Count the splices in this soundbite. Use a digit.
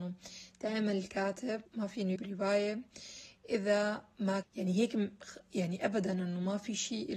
3